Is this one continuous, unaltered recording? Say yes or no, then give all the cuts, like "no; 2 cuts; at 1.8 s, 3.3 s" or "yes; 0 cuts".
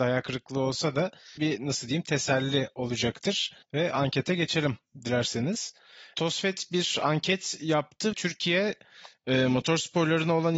no; 3 cuts; at 1.4 s, 3.6 s, 8.1 s